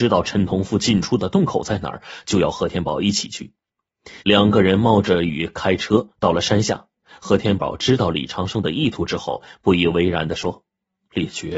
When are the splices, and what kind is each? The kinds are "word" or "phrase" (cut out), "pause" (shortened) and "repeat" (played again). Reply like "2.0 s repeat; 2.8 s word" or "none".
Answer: 4.2 s pause